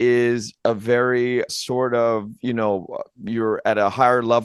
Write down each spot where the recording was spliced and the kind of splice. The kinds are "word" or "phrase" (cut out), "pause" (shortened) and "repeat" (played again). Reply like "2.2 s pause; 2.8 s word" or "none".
1.5 s word